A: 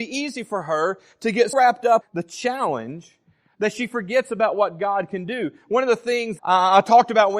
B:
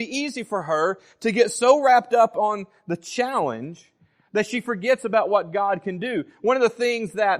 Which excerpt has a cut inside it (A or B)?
A